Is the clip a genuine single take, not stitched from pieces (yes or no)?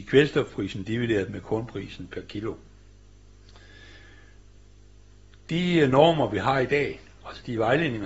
yes